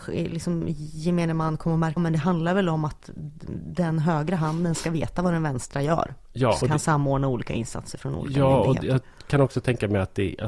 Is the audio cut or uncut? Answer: cut